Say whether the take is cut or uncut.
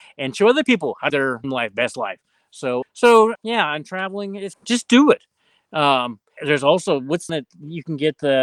cut